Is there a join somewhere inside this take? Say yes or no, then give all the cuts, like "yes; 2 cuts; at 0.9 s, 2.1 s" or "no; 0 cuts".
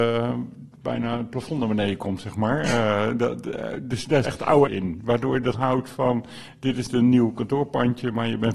yes; 4 cuts; at 4.2 s, 4.7 s, 5.5 s, 6.9 s